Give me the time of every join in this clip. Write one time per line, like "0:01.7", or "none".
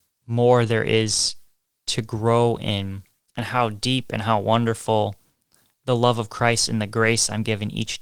none